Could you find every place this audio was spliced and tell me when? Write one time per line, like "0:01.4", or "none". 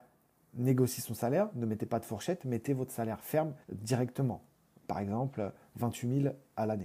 0:03.6